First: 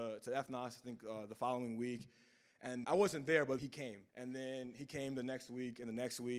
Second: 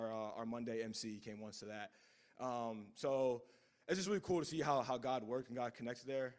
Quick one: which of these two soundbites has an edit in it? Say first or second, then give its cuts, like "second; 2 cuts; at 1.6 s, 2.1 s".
first; 3 cuts; at 2.8 s, 3.6 s, 4.1 s